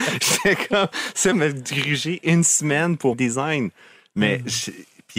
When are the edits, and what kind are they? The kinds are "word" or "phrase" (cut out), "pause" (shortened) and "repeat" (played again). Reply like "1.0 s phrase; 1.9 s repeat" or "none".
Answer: 1.3 s word; 3.1 s word